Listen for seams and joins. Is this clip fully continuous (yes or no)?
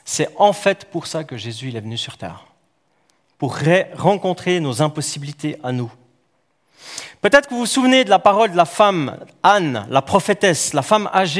yes